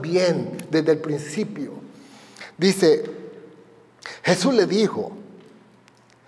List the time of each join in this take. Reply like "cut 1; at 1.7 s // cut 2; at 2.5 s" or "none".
none